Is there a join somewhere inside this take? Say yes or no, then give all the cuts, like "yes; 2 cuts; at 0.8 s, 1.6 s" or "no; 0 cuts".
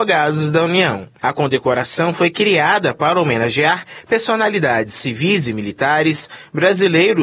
no; 0 cuts